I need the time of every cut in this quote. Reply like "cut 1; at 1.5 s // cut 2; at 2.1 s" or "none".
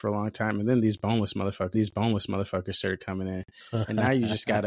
cut 1; at 1.7 s